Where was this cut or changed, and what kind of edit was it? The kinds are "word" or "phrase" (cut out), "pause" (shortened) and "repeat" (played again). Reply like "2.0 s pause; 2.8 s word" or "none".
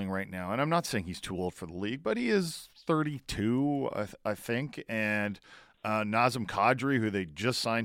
none